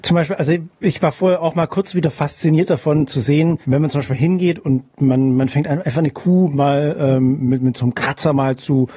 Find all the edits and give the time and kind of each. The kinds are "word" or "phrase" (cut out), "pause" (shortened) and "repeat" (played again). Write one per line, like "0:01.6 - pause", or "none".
0:03.6 - pause